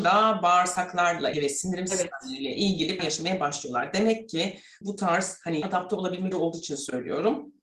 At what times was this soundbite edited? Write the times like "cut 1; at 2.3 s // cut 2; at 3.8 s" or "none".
cut 1; at 1.3 s // cut 2; at 3.0 s // cut 3; at 4.8 s // cut 4; at 5.6 s // cut 5; at 6.3 s